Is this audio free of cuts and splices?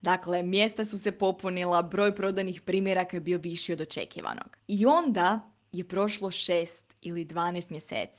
no; 1 cut; at 4.6 s

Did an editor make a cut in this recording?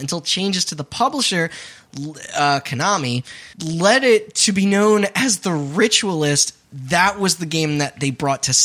yes; 2 cuts; at 3.5 s, 6.6 s

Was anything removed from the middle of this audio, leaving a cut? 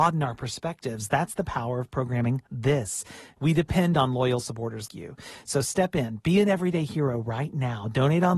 yes; 2 cuts; at 2.5 s, 4.9 s

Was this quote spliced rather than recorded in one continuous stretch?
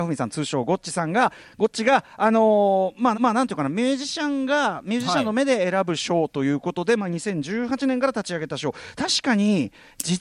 yes; 1 cut; at 3.1 s

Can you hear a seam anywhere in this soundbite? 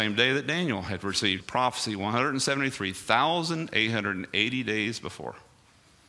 yes; 1 cut; at 1.4 s

